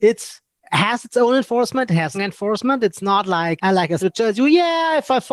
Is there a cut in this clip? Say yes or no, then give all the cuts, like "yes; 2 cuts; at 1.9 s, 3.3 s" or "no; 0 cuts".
yes; 3 cuts; at 2.1 s, 3.6 s, 4.0 s